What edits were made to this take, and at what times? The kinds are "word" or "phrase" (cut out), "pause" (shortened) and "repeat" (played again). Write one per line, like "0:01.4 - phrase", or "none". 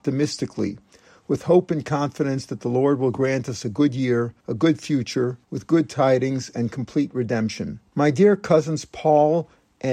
0:04.4 - pause
0:05.4 - pause
0:07.9 - pause